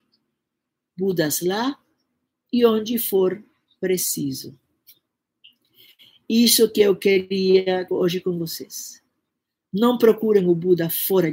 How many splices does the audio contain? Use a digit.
1